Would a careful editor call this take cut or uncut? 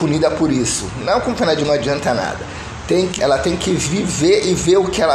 cut